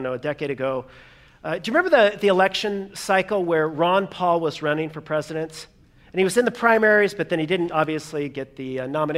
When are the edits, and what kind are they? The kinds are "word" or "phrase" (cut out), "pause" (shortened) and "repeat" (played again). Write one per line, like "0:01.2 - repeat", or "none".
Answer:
none